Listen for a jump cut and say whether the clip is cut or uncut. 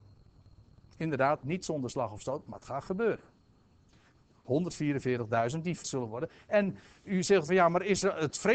cut